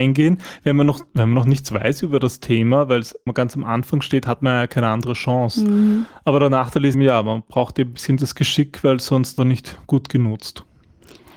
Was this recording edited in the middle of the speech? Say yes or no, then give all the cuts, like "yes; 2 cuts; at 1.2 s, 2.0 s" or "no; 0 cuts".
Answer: yes; 4 cuts; at 3.3 s, 6.9 s, 8.2 s, 9.4 s